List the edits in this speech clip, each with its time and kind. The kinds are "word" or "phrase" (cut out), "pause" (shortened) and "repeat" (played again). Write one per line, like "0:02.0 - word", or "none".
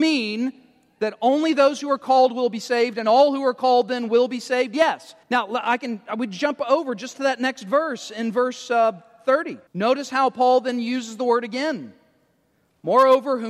0:05.2 - pause
0:09.7 - pause